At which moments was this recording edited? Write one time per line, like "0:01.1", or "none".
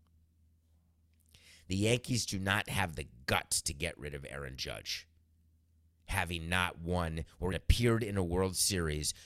0:07.5